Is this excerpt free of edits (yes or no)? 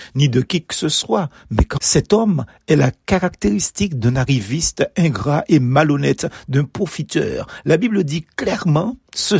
no